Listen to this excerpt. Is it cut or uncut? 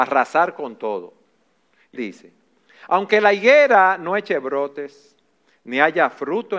cut